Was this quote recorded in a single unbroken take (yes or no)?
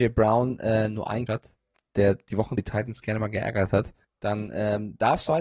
no